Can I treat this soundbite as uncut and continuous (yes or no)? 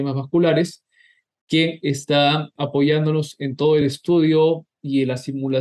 yes